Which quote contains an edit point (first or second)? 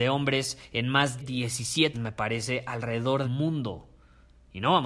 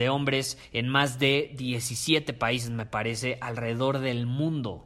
first